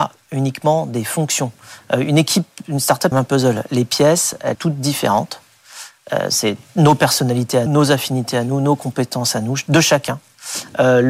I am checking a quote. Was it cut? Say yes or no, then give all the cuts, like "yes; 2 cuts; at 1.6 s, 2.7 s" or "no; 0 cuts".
yes; 3 cuts; at 3.1 s, 4.5 s, 7.7 s